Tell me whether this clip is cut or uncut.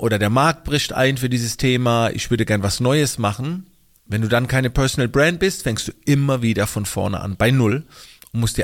uncut